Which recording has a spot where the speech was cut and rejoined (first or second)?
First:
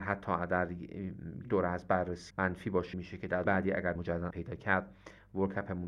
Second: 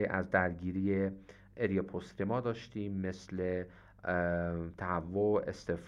first